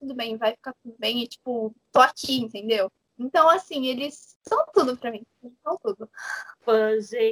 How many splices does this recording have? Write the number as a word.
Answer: zero